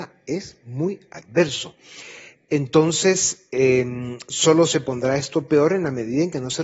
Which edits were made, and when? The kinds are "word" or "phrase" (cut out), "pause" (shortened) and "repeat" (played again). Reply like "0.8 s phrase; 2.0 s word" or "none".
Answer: none